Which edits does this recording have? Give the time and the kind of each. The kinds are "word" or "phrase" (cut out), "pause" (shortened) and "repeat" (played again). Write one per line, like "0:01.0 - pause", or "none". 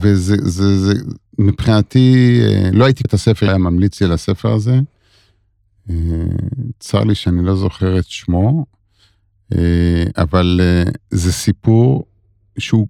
0:01.3 - pause
0:03.0 - word
0:03.5 - phrase

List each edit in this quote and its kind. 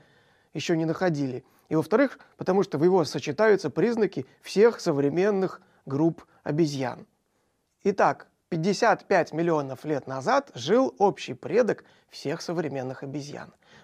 0:03.1 - word

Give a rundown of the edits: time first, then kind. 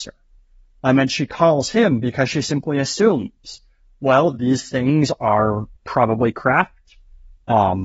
none

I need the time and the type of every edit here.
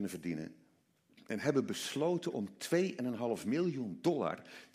none

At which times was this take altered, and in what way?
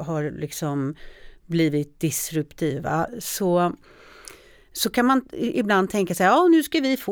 none

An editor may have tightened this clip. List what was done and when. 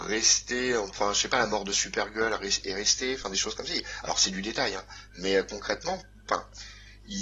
none

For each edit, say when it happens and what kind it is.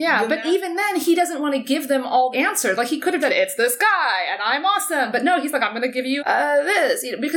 0:02.3 - word
0:03.2 - word
0:06.2 - word

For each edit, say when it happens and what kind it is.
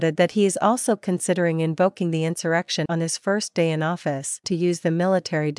0:02.9 - word
0:04.4 - phrase

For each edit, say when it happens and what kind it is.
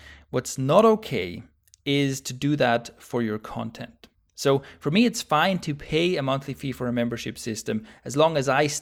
none

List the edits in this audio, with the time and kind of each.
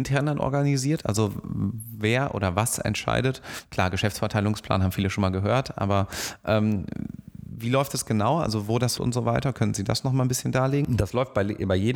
0:09.0 - phrase

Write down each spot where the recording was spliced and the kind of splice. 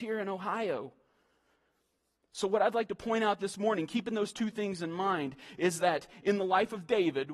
none

